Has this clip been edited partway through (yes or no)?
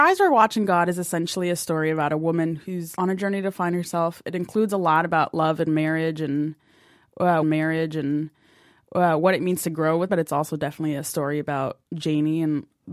yes